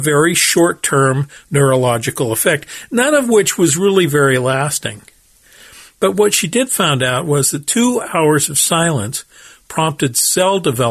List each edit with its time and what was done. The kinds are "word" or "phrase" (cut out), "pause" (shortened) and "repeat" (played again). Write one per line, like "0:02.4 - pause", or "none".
none